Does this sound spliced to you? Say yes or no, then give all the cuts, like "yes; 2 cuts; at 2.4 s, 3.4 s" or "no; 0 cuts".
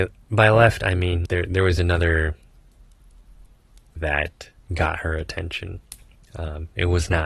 yes; 3 cuts; at 1.3 s, 4.0 s, 4.6 s